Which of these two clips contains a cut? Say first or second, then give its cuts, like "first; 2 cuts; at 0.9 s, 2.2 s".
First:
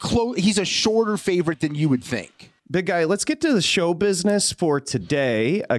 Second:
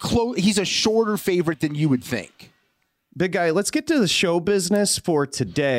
first; 1 cut; at 2.6 s